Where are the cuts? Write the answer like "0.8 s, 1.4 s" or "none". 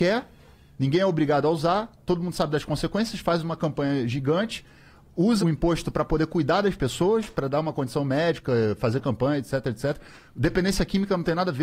5.4 s